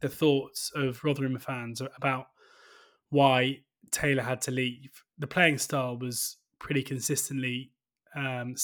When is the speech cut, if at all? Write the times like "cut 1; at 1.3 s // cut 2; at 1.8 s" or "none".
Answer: none